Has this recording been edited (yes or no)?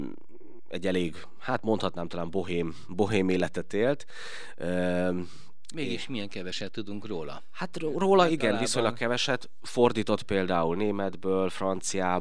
no